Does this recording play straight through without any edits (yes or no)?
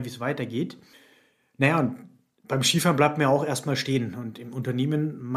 yes